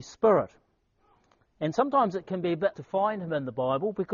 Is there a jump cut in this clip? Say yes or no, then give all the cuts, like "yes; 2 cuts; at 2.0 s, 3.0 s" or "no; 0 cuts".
yes; 1 cut; at 2.7 s